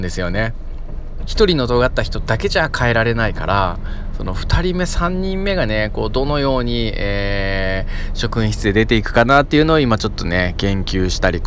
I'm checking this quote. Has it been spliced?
no; 0 cuts

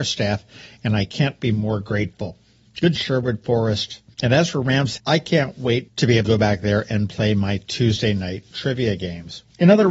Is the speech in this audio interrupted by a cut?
yes; 3 cuts; at 3.0 s, 5.0 s, 6.2 s

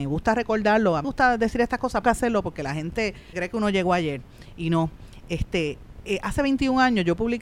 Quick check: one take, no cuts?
no; 3 cuts; at 1.0 s, 2.0 s, 3.3 s

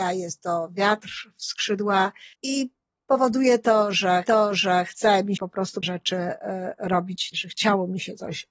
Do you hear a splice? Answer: yes; 5 cuts; at 2.3 s, 4.2 s, 5.4 s, 5.8 s, 7.3 s

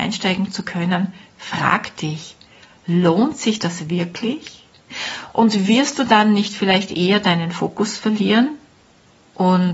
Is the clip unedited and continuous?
yes; 0 cuts

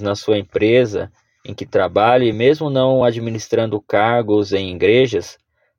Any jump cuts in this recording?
no; 0 cuts

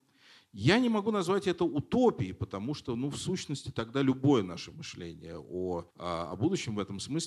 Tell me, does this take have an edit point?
yes; 1 cut; at 5.9 s

